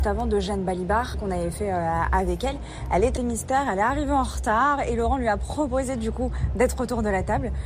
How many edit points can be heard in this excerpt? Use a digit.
2